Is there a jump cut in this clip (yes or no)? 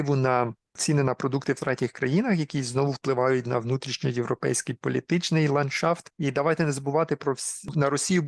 no